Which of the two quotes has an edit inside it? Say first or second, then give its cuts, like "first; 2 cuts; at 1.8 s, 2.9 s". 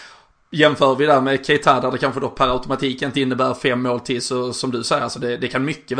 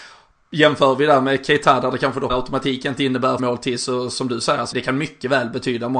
second; 3 cuts; at 2.3 s, 3.4 s, 4.7 s